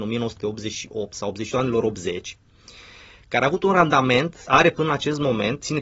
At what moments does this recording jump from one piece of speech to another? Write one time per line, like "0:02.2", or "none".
0:01.5
0:04.4